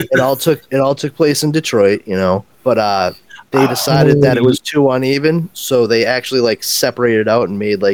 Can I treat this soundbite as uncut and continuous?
no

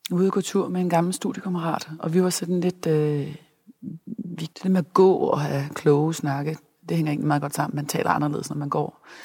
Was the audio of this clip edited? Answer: yes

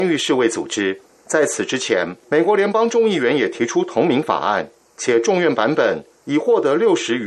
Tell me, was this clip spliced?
no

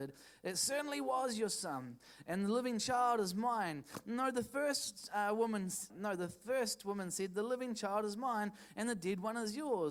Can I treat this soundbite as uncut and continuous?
no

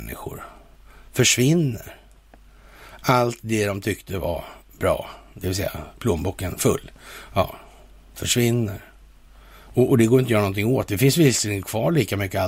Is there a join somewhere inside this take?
no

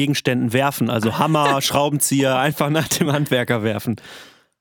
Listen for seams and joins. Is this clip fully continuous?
yes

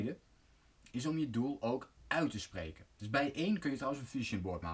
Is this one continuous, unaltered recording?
yes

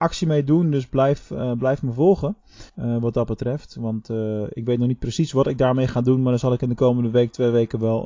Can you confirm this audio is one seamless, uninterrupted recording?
no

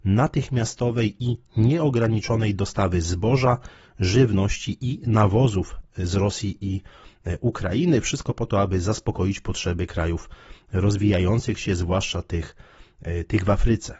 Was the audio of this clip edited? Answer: no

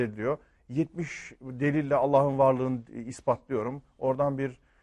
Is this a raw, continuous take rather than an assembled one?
yes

